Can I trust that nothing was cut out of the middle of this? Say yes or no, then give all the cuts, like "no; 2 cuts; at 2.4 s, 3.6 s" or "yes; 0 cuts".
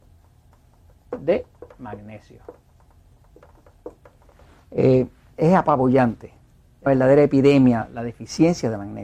no; 2 cuts; at 5.4 s, 6.9 s